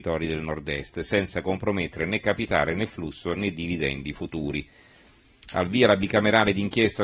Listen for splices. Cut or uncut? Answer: uncut